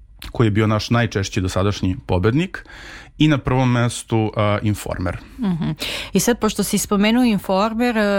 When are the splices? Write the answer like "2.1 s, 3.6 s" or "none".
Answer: none